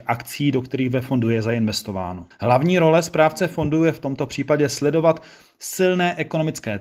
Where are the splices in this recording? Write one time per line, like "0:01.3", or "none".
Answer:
none